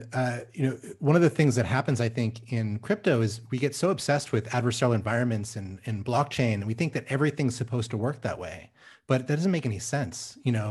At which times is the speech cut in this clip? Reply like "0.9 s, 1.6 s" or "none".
none